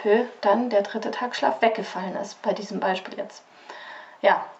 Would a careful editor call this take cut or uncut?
uncut